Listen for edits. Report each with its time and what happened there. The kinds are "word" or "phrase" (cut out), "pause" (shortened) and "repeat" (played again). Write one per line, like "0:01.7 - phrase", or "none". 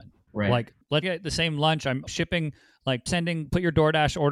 0:01.0 - word
0:02.1 - word
0:03.1 - word